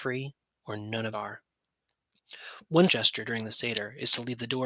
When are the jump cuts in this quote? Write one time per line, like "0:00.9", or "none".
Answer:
0:01.1
0:02.9